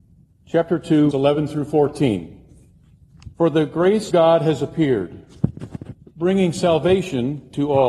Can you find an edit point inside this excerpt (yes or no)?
yes